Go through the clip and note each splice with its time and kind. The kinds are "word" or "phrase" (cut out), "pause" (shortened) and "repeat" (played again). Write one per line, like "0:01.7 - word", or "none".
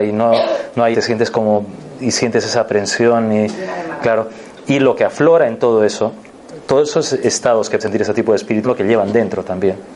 0:00.9 - word
0:07.8 - word
0:08.6 - word

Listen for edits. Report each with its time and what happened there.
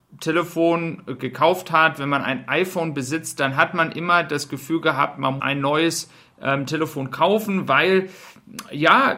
0:05.4 - phrase

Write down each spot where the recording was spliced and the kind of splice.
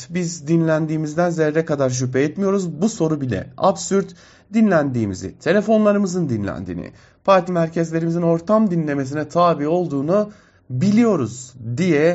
0:07.5 - word

